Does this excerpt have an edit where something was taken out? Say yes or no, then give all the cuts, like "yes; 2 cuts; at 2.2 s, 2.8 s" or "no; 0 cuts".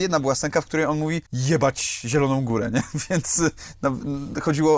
yes; 1 cut; at 1.3 s